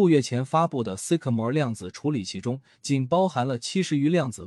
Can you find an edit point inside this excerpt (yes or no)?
no